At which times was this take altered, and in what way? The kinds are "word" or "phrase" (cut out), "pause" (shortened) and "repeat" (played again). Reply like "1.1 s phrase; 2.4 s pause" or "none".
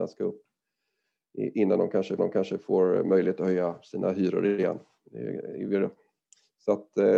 2.2 s repeat